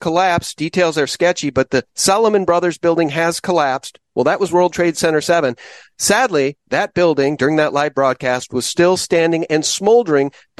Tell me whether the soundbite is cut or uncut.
uncut